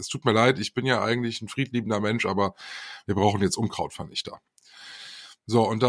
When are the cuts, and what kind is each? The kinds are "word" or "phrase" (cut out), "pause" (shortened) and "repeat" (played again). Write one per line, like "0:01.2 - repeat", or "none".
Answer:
none